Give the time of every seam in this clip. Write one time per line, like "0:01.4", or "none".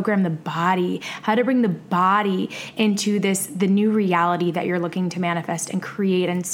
none

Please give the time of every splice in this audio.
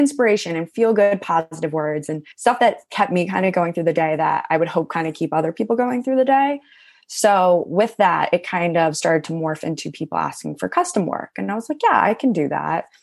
0:02.3

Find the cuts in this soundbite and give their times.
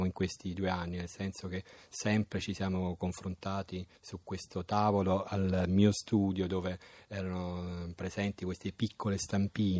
0:04.0

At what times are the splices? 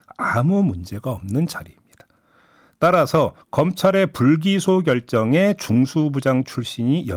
0:03.4

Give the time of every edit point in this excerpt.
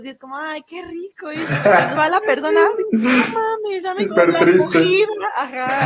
0:02.0
0:04.1

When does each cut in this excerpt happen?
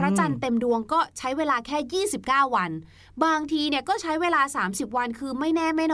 none

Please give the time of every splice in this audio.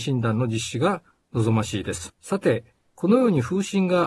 0:02.1

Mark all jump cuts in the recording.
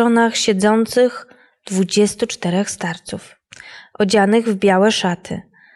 none

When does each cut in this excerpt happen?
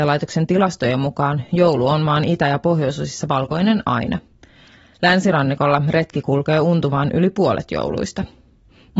none

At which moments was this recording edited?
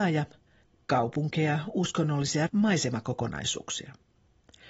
0:02.5

